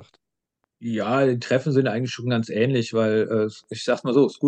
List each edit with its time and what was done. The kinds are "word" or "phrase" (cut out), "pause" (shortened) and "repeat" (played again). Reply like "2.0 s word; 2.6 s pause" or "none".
none